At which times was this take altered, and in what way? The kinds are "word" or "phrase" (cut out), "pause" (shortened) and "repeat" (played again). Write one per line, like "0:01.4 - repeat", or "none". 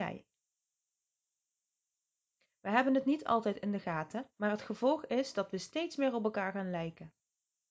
0:04.3 - pause